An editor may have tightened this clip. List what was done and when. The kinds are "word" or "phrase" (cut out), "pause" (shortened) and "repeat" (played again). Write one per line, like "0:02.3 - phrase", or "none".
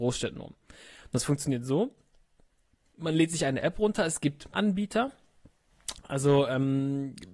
0:04.5 - word